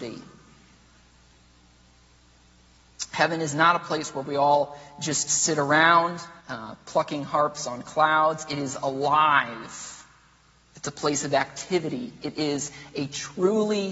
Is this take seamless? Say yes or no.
no